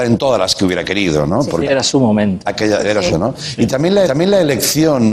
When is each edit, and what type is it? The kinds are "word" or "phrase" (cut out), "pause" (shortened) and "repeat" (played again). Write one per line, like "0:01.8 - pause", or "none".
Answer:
0:01.6 - word
0:03.1 - word
0:04.0 - repeat